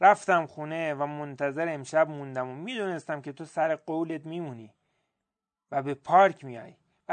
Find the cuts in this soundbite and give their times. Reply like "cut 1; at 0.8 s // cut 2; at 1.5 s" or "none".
none